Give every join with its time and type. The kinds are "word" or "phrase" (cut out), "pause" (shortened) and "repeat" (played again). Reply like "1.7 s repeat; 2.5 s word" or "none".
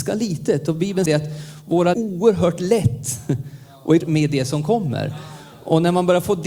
1.1 s word; 1.9 s phrase; 4.0 s phrase